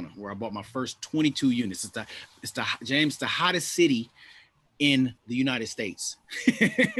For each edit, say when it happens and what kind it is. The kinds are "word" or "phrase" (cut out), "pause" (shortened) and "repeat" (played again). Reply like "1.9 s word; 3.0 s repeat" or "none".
5.2 s pause

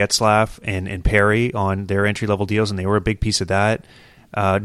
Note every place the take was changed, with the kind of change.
none

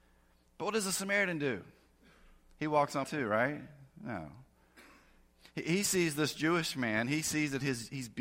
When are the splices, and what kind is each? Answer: 3.0 s word

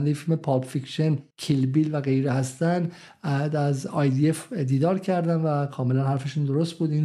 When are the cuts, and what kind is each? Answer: 1.3 s pause

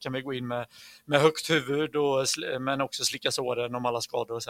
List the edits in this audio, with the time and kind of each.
none

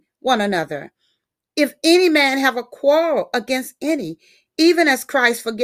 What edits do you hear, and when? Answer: none

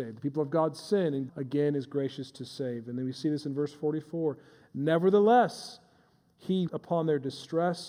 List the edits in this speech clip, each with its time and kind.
1.3 s word; 6.7 s word

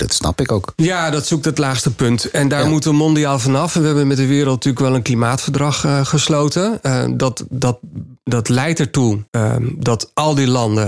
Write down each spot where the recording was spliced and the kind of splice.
9.3 s pause

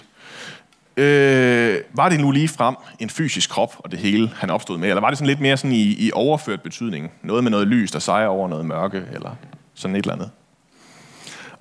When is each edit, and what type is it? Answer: 1.9 s pause

